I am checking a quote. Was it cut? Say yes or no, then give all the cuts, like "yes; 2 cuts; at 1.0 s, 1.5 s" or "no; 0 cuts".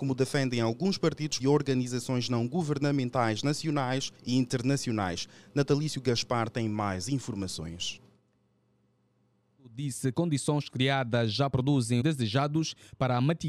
yes; 4 cuts; at 1.4 s, 4.1 s, 10.1 s, 12.0 s